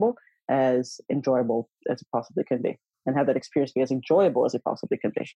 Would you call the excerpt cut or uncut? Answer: uncut